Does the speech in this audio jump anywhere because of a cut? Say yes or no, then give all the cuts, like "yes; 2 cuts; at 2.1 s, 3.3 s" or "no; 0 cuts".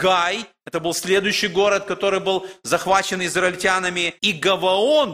yes; 1 cut; at 4.2 s